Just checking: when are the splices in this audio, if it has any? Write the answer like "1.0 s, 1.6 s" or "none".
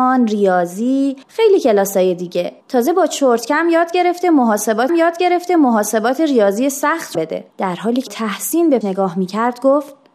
1.2 s, 2.6 s, 4.9 s, 7.1 s, 7.5 s, 8.1 s, 8.8 s